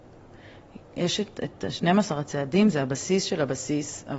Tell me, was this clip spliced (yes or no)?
no